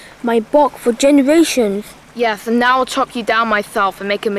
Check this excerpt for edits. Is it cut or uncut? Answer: uncut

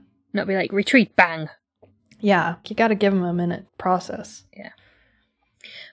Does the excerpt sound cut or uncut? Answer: cut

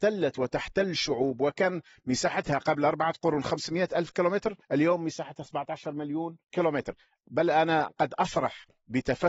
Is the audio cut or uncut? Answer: cut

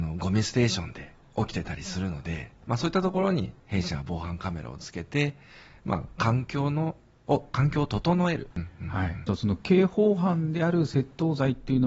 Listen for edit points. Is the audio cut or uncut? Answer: cut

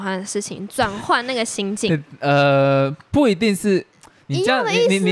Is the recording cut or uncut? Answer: uncut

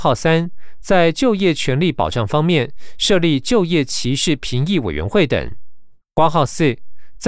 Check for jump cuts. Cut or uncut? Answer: cut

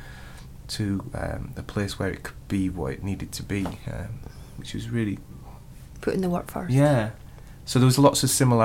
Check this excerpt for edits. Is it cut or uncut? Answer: uncut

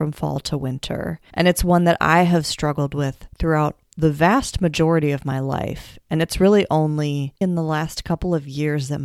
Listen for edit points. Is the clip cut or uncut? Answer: cut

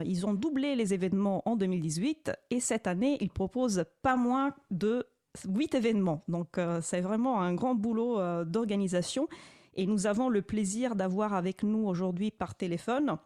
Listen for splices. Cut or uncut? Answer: uncut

